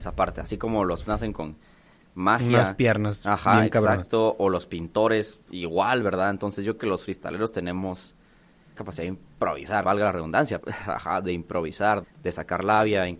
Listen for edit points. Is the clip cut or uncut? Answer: cut